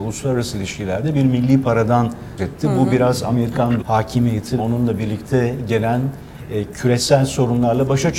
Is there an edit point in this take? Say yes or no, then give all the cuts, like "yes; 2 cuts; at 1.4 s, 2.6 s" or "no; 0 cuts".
yes; 3 cuts; at 2.4 s, 3.8 s, 4.6 s